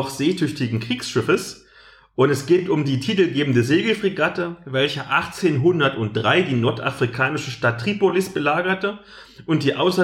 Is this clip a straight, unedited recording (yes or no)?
yes